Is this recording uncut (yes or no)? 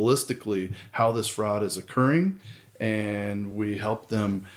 yes